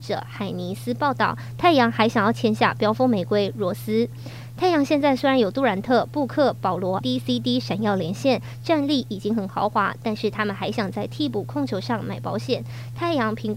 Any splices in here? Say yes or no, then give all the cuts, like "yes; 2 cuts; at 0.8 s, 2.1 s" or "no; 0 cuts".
yes; 1 cut; at 7.0 s